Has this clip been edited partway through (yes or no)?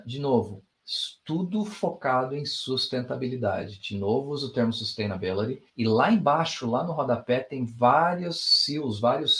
yes